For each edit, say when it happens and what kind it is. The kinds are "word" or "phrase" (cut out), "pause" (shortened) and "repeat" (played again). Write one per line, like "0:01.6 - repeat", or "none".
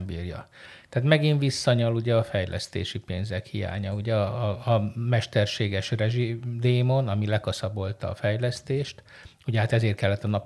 none

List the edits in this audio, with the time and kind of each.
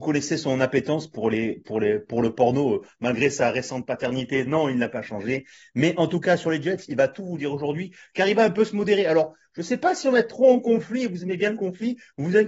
none

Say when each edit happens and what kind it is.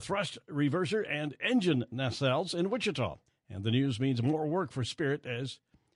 0:03.3 - pause

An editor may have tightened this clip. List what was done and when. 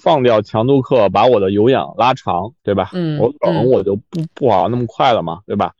0:02.6 - pause

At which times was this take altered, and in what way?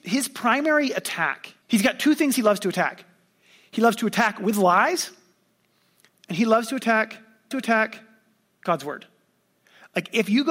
0:01.6 - pause
0:07.5 - repeat

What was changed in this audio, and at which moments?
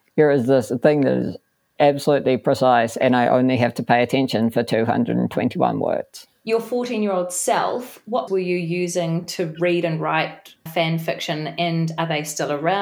0:01.8 - word
0:08.3 - word
0:10.7 - word

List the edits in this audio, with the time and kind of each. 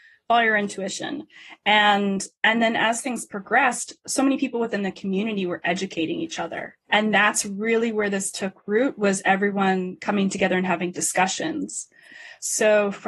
0:06.8 - pause

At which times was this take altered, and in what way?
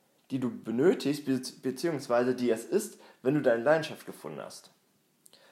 none

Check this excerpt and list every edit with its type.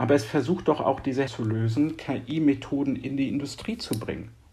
0:01.3 - word

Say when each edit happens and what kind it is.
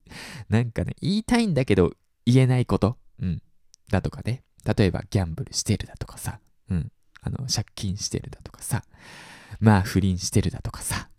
none

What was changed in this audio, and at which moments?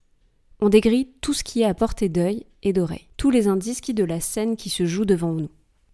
0:03.9 - phrase

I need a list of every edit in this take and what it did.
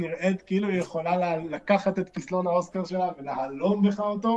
none

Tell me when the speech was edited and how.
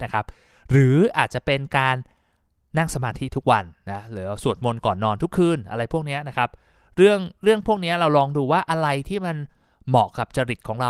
none

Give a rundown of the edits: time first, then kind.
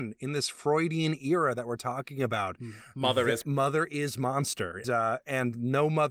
0:03.4 - word
0:04.8 - word

